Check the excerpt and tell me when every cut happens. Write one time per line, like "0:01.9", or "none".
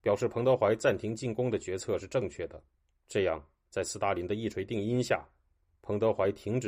0:02.8